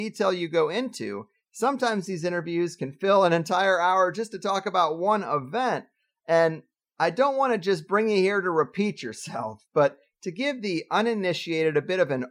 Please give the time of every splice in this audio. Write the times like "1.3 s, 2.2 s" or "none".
none